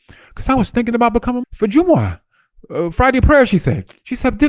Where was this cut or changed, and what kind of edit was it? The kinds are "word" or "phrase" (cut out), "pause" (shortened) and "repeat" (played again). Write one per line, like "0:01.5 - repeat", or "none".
0:01.4 - word
0:02.9 - word